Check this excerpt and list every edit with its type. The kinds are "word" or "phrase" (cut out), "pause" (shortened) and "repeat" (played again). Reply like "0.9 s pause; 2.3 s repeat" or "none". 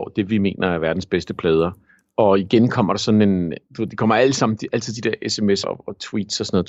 1.9 s pause; 3.7 s pause; 5.6 s word